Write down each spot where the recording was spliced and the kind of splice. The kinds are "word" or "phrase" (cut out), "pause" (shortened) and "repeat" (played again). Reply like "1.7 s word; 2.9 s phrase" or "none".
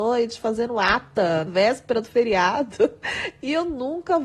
1.5 s word